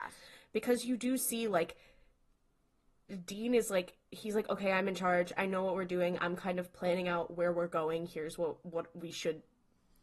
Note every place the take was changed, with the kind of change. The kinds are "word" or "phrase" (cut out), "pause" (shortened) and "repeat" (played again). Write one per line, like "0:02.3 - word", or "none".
none